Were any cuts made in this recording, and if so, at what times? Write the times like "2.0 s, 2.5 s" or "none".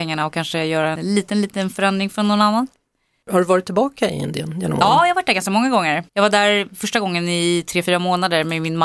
6.1 s